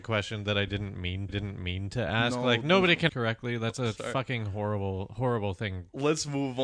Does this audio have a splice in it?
yes; 2 cuts; at 1.3 s, 3.1 s

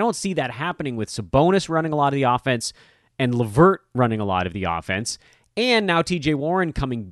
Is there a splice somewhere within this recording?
no; 0 cuts

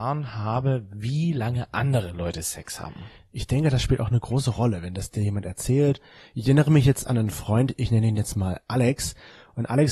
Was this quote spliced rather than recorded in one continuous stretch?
no; 0 cuts

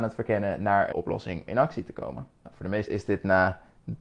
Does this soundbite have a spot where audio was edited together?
yes; 4 cuts; at 0.9 s, 1.5 s, 2.4 s, 2.9 s

